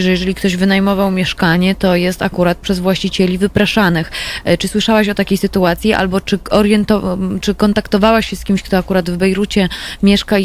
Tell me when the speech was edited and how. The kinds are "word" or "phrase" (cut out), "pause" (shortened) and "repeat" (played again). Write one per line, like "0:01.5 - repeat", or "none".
none